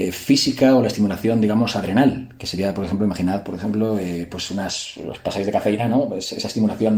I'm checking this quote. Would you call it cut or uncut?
uncut